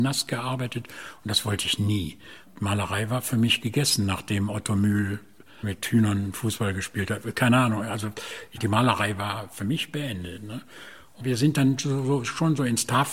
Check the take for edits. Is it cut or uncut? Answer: uncut